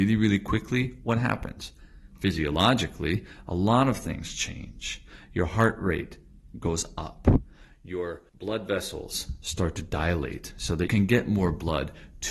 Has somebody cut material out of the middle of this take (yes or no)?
yes